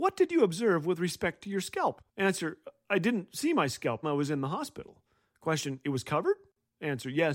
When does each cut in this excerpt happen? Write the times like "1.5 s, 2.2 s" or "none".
2.1 s, 4.0 s